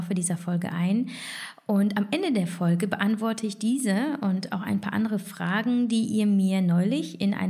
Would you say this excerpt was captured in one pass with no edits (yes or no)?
yes